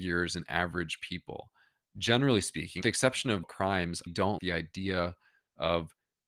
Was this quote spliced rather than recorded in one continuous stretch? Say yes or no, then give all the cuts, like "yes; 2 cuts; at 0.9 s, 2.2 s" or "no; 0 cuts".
yes; 4 cuts; at 2.8 s, 3.4 s, 4.1 s, 4.4 s